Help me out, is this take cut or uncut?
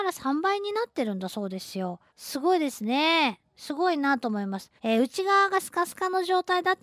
cut